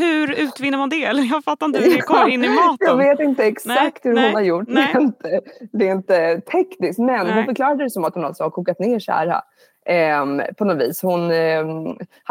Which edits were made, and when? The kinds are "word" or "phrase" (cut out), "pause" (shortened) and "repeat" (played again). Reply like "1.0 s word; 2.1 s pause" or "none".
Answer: none

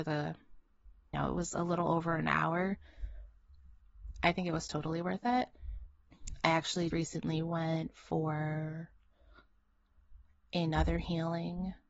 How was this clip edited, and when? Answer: 1.1 s word; 6.9 s word

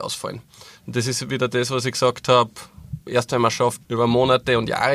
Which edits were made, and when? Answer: 3.0 s pause; 3.8 s pause

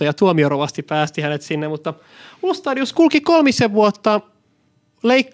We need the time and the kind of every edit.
none

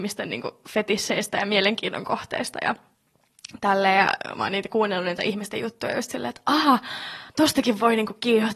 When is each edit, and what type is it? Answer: 7.3 s pause

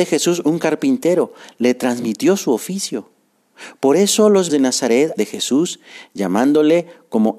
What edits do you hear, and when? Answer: 4.5 s word; 5.2 s word

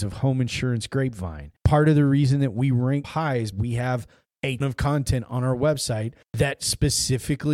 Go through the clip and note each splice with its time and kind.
1.6 s pause; 3.0 s word; 3.5 s word; 4.6 s word; 6.2 s pause

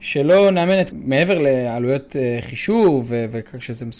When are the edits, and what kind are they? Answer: 0.9 s phrase

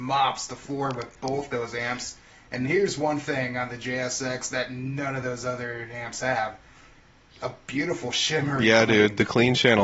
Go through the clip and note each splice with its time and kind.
none

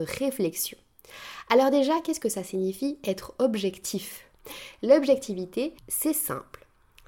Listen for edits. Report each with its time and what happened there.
5.8 s pause

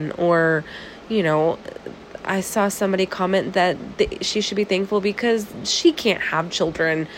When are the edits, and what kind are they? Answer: none

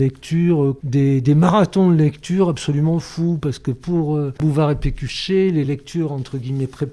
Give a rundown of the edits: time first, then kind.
none

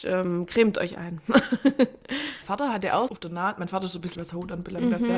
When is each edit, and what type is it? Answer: 2.4 s word; 3.1 s word; 4.2 s word

